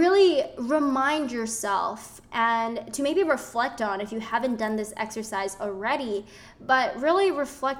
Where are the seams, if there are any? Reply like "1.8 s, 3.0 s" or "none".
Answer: none

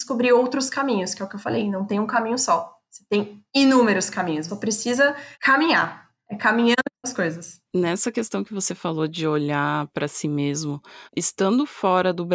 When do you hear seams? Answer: 3.5 s, 4.5 s, 5.3 s, 7.0 s, 7.7 s, 11.1 s

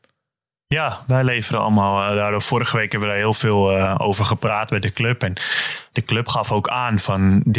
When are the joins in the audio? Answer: none

